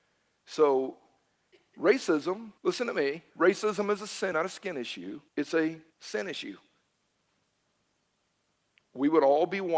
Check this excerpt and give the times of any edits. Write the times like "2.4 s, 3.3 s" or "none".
2.6 s, 3.3 s, 4.3 s, 5.3 s, 5.9 s

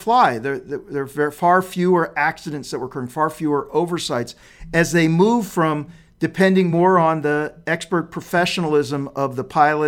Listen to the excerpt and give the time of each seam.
none

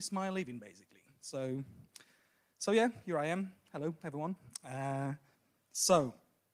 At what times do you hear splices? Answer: none

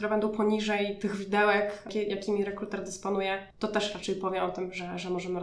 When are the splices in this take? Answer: 3.5 s

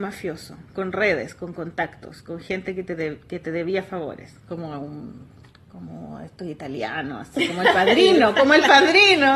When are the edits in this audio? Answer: none

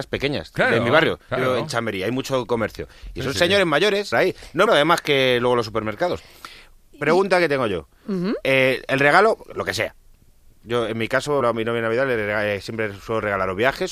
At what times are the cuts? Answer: 4.1 s, 4.7 s, 11.4 s

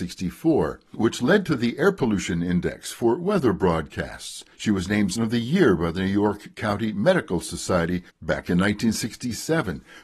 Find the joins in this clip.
4.5 s, 5.2 s, 8.1 s

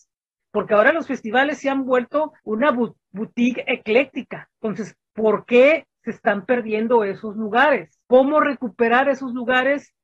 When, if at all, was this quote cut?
2.4 s, 4.6 s, 8.0 s

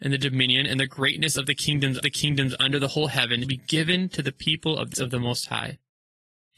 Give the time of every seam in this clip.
2.0 s, 3.4 s, 4.9 s

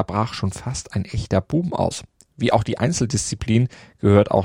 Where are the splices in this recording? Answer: none

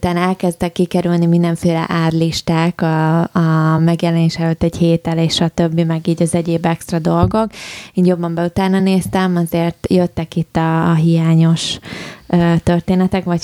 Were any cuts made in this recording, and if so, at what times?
none

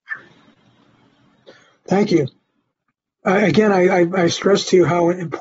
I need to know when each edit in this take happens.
none

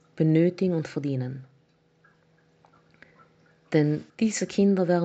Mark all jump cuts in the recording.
4.1 s

